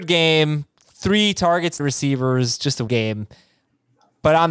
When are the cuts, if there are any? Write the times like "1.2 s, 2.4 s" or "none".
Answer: 1.8 s, 2.9 s